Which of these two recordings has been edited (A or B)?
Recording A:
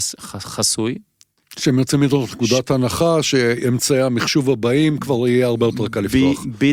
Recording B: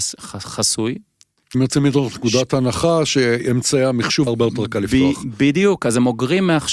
B